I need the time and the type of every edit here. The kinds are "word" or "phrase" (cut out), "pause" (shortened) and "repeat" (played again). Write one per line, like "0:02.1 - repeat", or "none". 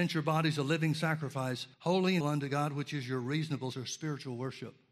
0:01.7 - pause
0:02.2 - word
0:03.7 - word